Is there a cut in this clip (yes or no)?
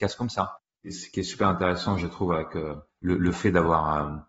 no